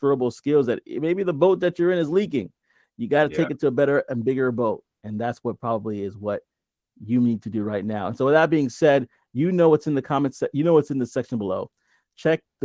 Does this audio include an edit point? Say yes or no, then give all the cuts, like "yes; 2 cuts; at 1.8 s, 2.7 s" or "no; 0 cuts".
no; 0 cuts